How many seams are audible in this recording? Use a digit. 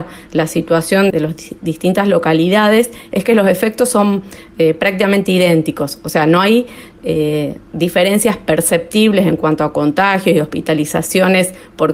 1